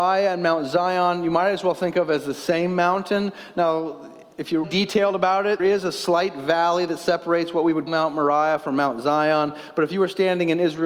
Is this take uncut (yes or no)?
no